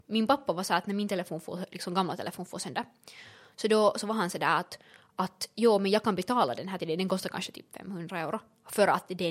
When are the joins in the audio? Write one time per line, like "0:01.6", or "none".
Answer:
0:06.8